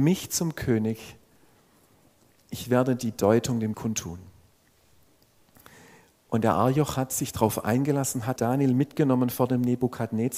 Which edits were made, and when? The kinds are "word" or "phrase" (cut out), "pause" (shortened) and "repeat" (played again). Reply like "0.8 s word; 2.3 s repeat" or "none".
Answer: 3.7 s word; 8.4 s word